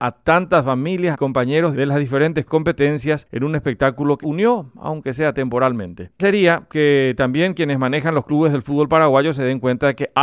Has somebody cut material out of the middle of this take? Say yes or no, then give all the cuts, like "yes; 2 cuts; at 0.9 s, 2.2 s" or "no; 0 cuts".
yes; 4 cuts; at 1.1 s, 1.7 s, 4.2 s, 6.2 s